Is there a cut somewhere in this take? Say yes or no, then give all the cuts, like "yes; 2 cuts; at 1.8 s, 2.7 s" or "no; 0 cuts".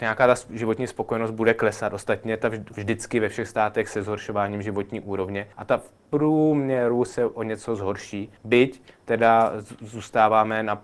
yes; 3 cuts; at 2.7 s, 5.5 s, 8.4 s